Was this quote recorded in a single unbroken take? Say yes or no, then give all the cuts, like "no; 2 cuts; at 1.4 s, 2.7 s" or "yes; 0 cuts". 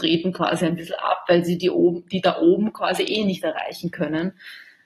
yes; 0 cuts